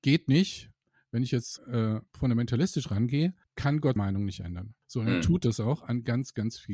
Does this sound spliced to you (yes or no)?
yes